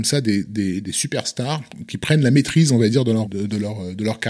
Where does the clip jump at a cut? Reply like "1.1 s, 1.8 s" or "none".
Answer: 3.3 s